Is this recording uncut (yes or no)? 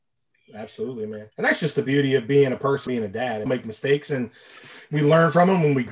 no